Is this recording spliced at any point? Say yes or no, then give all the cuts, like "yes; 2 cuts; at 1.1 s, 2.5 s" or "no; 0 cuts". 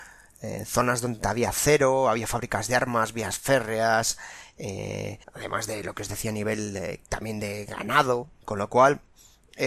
yes; 1 cut; at 5.2 s